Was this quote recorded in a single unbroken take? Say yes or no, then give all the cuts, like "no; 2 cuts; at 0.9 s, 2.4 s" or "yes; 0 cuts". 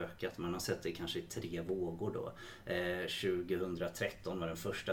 yes; 0 cuts